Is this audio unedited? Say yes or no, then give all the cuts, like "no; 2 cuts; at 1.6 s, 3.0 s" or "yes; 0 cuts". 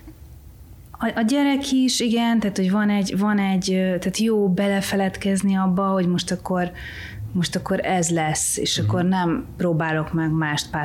yes; 0 cuts